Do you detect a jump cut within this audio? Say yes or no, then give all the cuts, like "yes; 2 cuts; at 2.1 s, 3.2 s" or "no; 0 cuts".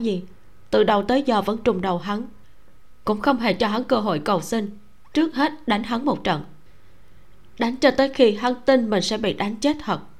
no; 0 cuts